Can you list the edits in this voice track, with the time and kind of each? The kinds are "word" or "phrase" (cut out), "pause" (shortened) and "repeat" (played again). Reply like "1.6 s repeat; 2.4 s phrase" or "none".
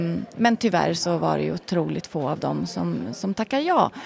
none